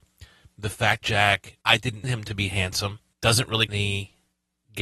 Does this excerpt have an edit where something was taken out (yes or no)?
yes